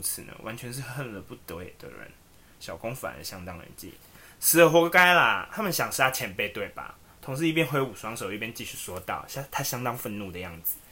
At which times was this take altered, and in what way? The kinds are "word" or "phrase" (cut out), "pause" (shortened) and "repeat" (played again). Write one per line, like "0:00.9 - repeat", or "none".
none